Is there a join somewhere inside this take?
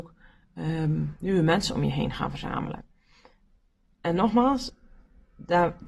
no; 0 cuts

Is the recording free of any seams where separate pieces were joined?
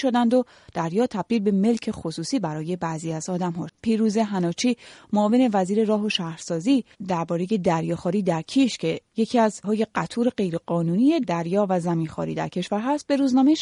no; 2 cuts; at 3.7 s, 9.6 s

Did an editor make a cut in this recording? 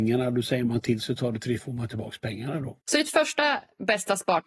yes; 2 cuts; at 1.6 s, 2.8 s

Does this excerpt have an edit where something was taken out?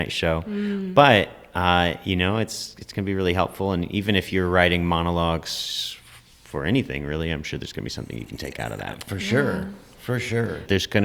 no; 0 cuts

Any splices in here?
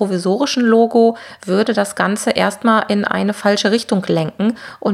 no; 0 cuts

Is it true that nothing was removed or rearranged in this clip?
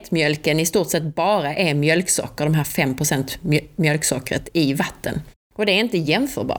no; 1 cut; at 5.4 s

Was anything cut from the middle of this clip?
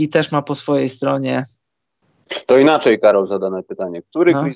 no; 0 cuts

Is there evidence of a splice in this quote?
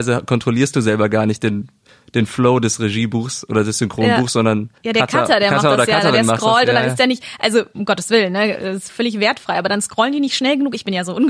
yes; 2 cuts; at 4.8 s, 8.9 s

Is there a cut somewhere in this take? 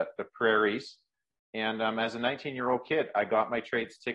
no; 0 cuts

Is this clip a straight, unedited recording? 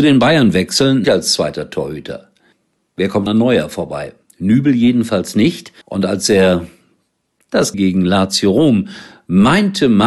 no; 6 cuts; at 1.0 s, 2.5 s, 3.3 s, 4.2 s, 5.8 s, 7.7 s

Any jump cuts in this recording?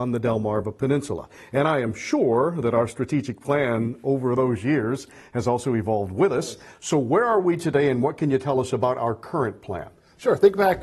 no; 0 cuts

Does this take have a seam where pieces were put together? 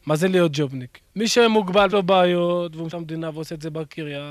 yes; 3 cuts; at 1.1 s, 1.9 s, 2.9 s

